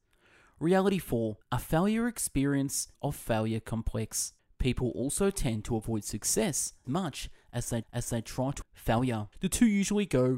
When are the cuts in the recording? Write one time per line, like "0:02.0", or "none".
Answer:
0:01.4
0:02.9
0:04.4
0:06.8
0:07.8
0:08.6
0:09.3